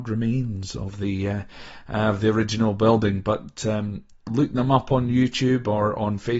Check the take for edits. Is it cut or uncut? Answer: uncut